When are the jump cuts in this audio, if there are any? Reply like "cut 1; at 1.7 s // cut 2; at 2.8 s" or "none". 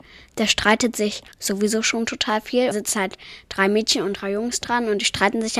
cut 1; at 1.3 s // cut 2; at 2.7 s